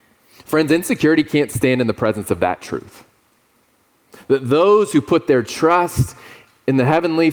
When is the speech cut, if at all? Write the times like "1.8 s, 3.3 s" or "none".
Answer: none